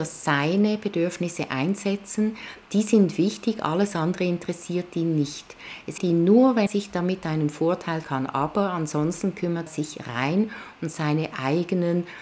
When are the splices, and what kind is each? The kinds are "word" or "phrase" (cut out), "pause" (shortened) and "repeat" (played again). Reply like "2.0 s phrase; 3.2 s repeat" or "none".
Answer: 6.0 s word; 6.7 s word; 8.0 s word; 9.7 s word